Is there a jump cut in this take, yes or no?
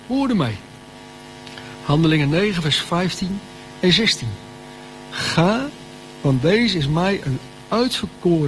no